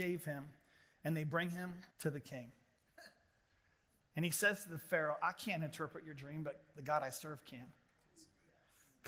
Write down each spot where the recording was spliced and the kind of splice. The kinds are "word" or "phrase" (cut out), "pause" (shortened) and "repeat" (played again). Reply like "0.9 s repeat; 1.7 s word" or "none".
1.9 s pause